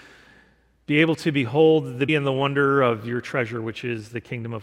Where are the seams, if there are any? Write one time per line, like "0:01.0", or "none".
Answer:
0:02.1